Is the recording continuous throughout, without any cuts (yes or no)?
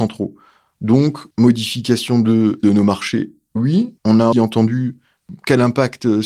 no